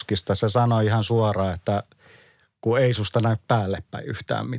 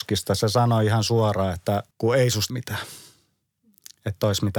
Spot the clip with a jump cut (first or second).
second